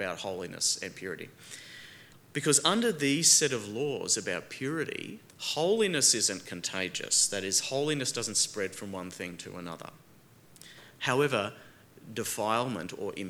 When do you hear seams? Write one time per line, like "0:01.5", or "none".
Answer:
0:02.1
0:05.3